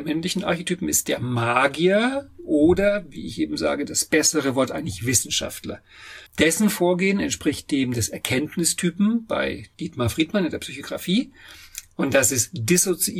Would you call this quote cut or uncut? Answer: cut